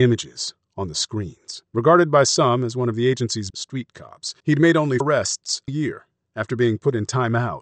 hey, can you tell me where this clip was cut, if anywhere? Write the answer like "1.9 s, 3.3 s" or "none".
1.7 s, 3.5 s, 4.4 s, 5.0 s, 5.7 s